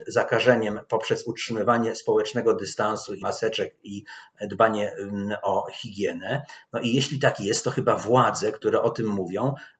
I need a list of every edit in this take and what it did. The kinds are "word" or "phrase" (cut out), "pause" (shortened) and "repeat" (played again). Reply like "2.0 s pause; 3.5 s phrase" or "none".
3.2 s word

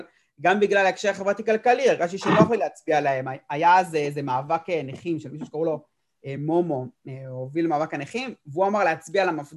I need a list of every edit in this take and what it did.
none

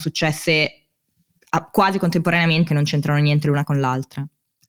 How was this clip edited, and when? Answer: 2.7 s word

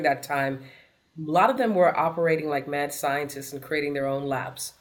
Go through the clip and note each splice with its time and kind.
none

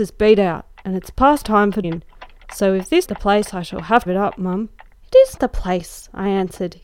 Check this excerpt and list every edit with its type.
1.4 s word; 1.8 s word; 3.0 s word; 4.1 s phrase; 4.9 s pause; 5.4 s word

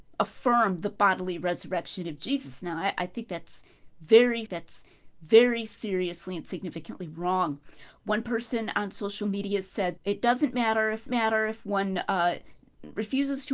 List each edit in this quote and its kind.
4.5 s repeat; 10.0 s word; 11.1 s repeat

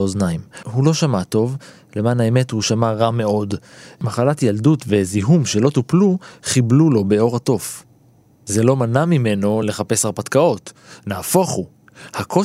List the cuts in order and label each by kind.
none

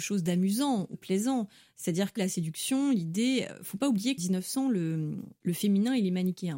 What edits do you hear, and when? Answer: 0.9 s word; 2.2 s word; 4.2 s word

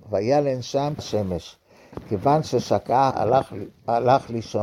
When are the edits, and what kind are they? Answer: 1.0 s word; 3.1 s word

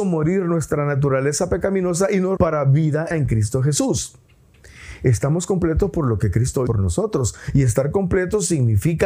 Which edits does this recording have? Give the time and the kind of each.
2.4 s word; 3.1 s word; 6.7 s word

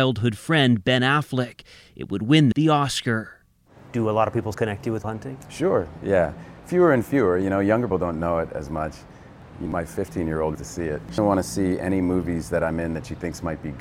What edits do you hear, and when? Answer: 2.5 s word; 4.5 s word; 5.0 s word; 6.0 s word; 7.9 s word; 9.7 s word; 10.5 s word; 11.2 s word

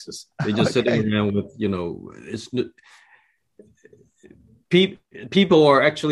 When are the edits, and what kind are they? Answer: none

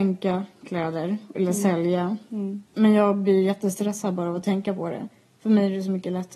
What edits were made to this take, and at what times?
2.7 s pause

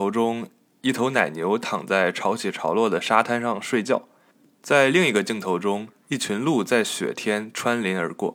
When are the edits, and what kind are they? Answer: none

